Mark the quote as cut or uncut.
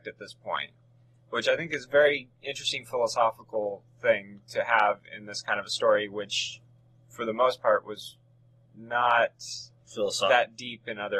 uncut